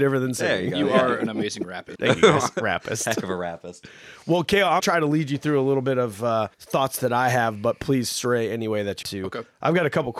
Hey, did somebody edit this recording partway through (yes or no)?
yes